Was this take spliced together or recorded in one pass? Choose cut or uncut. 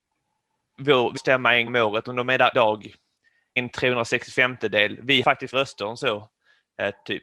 cut